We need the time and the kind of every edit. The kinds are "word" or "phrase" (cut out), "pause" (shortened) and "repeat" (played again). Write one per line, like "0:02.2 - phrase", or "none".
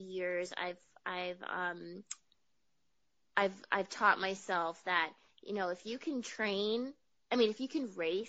none